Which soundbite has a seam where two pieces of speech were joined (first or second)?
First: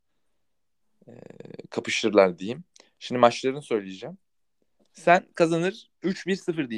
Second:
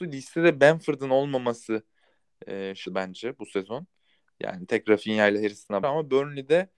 second